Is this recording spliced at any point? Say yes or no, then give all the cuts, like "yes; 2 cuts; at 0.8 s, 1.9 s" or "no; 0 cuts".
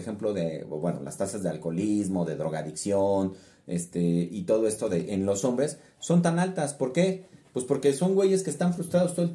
no; 0 cuts